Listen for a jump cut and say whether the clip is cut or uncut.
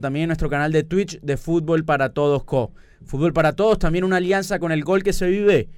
uncut